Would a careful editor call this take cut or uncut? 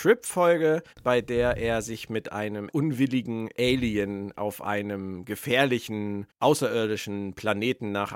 cut